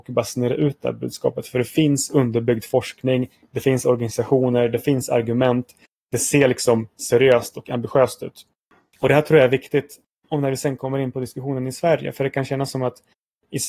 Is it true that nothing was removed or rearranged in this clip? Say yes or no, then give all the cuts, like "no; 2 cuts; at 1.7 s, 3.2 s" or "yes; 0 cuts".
yes; 0 cuts